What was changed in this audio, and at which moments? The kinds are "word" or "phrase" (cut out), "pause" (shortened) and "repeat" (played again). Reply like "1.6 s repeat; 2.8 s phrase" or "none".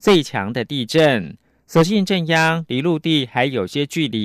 none